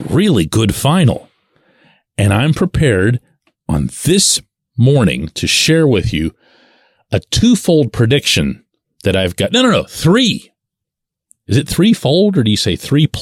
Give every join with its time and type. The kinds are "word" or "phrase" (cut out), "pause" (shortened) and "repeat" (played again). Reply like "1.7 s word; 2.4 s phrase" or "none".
none